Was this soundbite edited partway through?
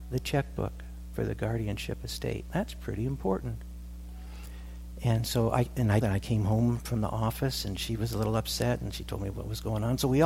yes; 1 cut; at 6.0 s

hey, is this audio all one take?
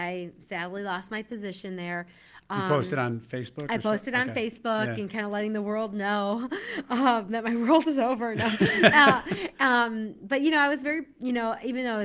yes; 0 cuts

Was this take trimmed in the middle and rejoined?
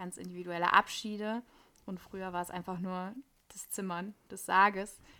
no; 0 cuts

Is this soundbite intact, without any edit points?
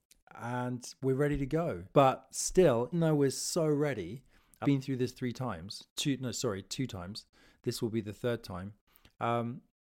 no; 3 cuts; at 1.9 s, 2.9 s, 4.6 s

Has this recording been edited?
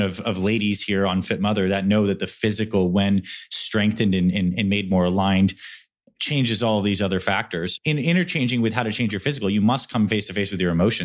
no; 0 cuts

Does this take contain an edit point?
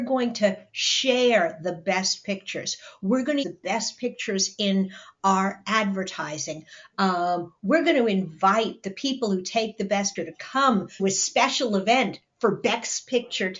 yes; 3 cuts; at 3.4 s, 10.2 s, 11.0 s

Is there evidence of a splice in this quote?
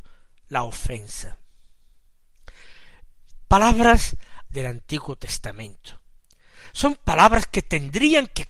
yes; 1 cut; at 4.5 s

